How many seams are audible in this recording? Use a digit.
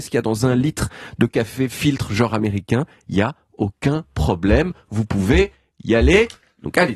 0